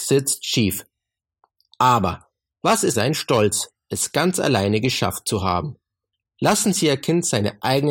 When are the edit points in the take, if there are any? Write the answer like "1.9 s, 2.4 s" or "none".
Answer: 2.9 s